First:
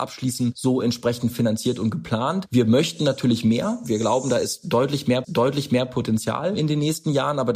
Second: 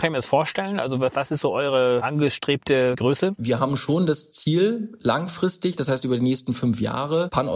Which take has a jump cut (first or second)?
first